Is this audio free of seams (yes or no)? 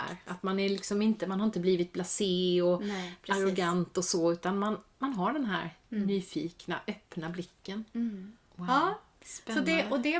no